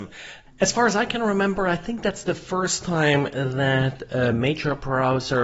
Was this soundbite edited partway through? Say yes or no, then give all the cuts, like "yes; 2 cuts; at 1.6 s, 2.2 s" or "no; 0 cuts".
no; 0 cuts